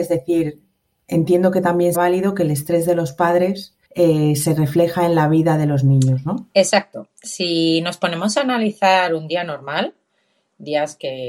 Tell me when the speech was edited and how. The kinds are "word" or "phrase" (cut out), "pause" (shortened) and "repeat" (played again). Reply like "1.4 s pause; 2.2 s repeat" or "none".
1.9 s word; 3.8 s pause